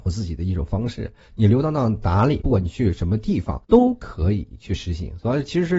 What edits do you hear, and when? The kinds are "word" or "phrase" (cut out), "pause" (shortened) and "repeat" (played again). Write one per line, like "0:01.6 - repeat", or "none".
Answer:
0:03.6 - pause